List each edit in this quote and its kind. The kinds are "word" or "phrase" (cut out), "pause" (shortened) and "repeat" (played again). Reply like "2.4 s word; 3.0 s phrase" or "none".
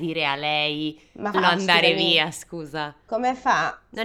1.3 s phrase